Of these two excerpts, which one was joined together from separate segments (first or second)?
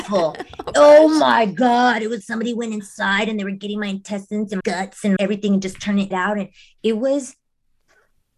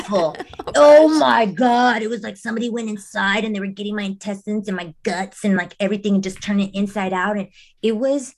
first